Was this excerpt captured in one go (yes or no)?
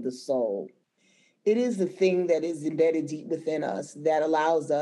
yes